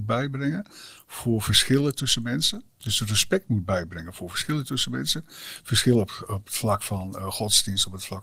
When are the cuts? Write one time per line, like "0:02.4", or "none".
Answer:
0:02.7